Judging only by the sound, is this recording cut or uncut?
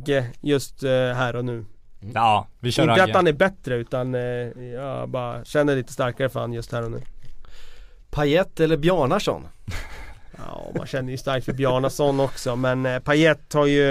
uncut